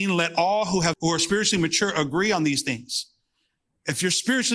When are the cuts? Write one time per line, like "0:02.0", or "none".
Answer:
0:00.9